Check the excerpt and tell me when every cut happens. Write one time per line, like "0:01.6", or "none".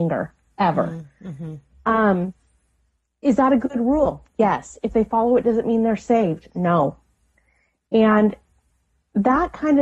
none